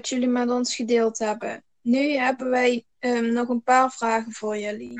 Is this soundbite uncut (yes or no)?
no